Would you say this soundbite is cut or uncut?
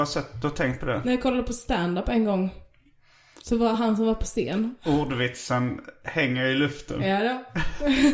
uncut